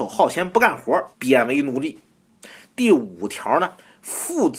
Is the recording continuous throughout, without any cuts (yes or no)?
no